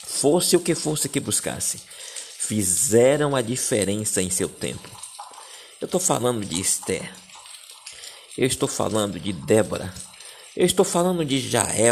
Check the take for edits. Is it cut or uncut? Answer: uncut